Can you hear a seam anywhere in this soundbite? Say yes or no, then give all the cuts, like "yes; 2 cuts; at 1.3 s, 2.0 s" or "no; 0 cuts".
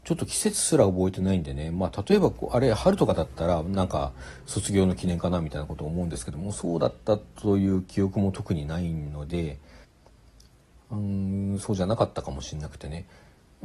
no; 0 cuts